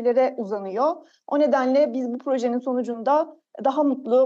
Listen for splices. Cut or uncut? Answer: uncut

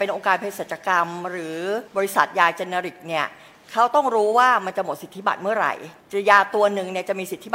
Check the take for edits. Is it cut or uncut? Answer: cut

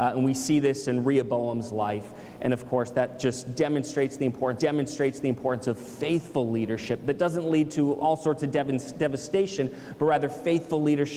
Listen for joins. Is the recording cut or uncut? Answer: cut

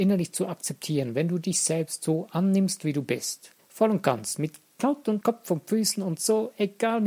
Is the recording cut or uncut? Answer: cut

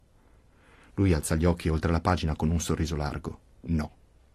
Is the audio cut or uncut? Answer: uncut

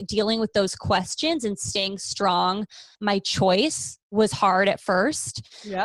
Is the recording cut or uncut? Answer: cut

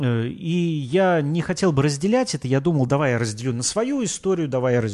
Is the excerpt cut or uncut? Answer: uncut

